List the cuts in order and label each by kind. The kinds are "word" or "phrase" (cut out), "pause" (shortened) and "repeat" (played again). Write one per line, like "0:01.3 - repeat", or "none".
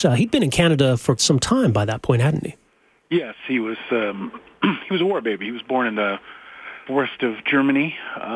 0:01.2 - word
0:06.9 - word